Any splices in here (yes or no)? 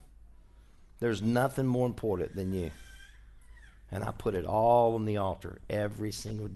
no